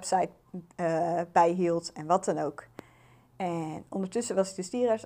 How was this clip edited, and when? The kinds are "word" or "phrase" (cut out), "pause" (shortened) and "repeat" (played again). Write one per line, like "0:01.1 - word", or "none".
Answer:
none